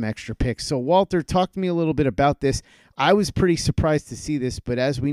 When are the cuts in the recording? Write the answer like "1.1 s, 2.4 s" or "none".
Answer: none